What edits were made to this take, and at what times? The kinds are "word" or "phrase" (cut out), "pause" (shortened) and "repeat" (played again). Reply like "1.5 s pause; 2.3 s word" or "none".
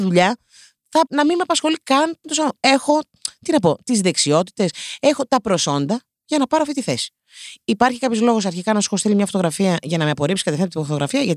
1.1 s word; 2.2 s word